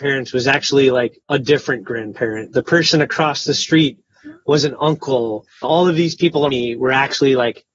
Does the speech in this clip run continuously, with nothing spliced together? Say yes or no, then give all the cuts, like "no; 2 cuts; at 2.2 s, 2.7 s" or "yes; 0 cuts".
no; 3 cuts; at 1.2 s, 5.6 s, 6.5 s